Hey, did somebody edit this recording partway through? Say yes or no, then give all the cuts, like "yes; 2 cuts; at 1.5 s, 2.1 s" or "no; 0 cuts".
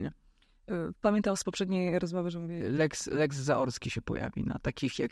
no; 0 cuts